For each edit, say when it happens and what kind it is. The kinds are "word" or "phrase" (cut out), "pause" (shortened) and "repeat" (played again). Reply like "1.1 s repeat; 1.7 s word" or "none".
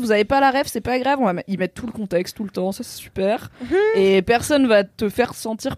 none